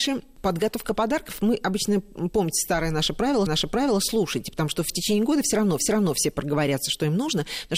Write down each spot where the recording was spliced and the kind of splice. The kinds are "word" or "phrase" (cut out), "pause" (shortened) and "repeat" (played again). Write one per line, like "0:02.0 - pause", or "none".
0:03.5 - repeat
0:05.8 - repeat